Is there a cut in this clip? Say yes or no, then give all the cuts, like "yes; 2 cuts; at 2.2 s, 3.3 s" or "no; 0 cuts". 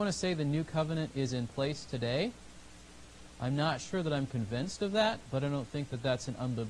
no; 0 cuts